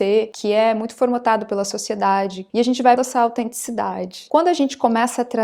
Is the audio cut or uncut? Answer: cut